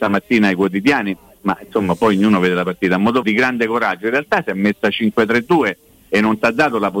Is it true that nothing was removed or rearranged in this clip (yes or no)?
no